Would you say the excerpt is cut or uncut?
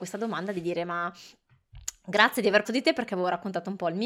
cut